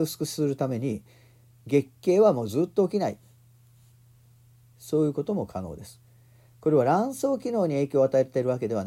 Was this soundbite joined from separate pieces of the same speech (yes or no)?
no